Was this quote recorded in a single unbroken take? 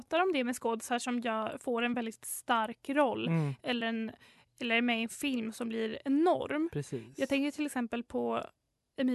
yes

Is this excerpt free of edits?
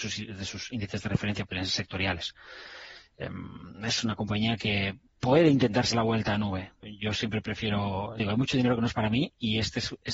no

